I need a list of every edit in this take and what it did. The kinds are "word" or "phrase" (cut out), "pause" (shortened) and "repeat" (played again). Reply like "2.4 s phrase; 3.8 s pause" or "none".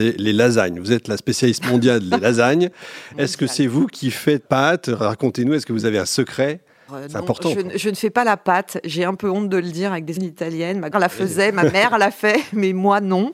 4.4 s word; 6.9 s word; 10.2 s word; 10.9 s word